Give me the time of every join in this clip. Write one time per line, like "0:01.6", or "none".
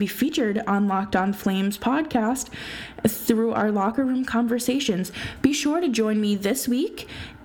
none

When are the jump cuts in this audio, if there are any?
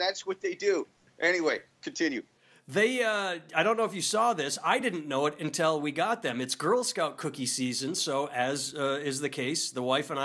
none

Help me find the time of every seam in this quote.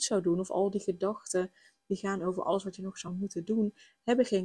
none

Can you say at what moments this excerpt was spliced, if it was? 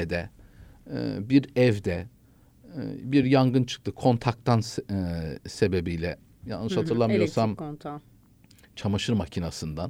none

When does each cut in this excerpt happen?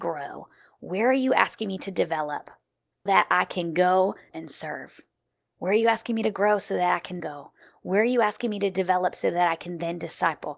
0:03.1
0:04.3
0:07.2

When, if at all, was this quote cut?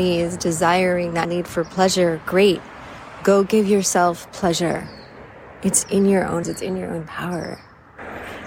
0:01.2
0:06.4

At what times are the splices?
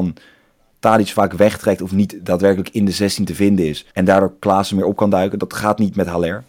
0:03.9

